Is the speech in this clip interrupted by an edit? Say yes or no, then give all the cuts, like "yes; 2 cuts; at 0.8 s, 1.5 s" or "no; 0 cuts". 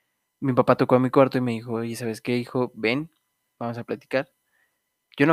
no; 0 cuts